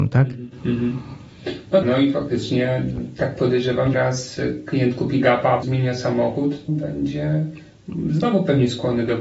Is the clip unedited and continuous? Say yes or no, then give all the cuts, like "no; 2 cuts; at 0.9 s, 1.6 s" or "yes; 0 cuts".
no; 4 cuts; at 1.8 s, 3.9 s, 5.6 s, 6.7 s